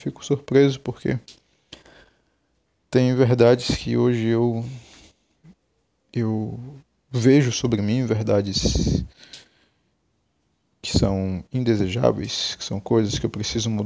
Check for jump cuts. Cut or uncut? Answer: uncut